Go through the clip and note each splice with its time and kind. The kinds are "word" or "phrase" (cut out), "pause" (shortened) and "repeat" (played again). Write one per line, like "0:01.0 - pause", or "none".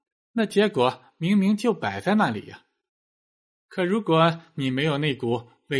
none